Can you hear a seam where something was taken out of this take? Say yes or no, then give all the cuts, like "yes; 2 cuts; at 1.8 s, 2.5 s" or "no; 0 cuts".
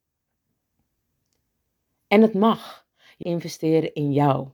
yes; 1 cut; at 3.2 s